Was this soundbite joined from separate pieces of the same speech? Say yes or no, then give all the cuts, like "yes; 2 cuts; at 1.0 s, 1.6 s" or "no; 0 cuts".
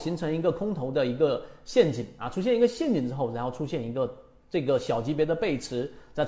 no; 0 cuts